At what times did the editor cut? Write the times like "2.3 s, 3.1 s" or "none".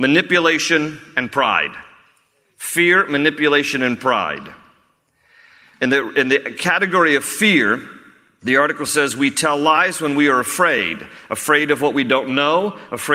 none